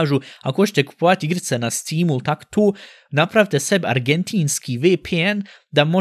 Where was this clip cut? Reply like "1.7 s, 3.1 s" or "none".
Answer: none